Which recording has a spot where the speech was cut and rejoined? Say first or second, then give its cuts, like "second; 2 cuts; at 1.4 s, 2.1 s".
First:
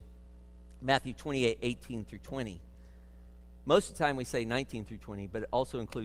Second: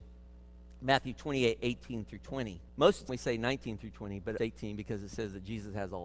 second; 3 cuts; at 2.7 s, 3.1 s, 4.4 s